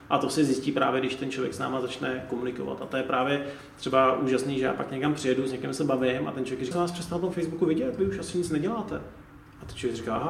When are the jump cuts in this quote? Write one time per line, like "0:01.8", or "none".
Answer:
0:06.7